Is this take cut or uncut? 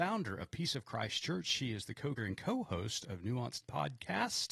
cut